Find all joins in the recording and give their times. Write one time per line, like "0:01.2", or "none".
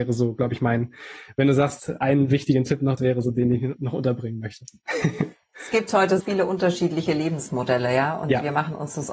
0:03.0
0:06.2